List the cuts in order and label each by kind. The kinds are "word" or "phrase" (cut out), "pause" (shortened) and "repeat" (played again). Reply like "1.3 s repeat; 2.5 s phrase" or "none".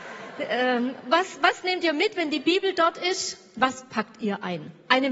none